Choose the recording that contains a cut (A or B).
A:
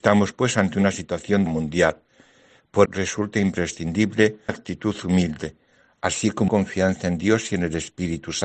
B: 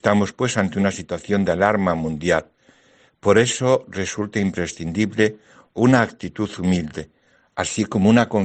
A